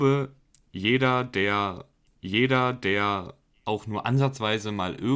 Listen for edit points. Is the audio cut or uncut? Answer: cut